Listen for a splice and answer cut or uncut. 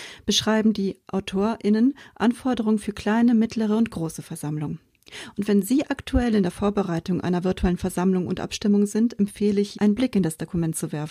cut